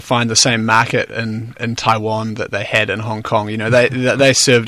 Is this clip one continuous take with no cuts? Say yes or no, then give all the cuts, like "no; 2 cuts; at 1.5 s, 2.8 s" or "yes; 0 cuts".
yes; 0 cuts